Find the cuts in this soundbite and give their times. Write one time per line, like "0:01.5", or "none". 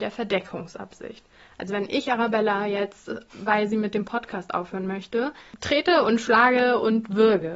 none